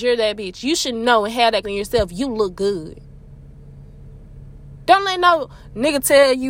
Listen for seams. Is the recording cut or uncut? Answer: cut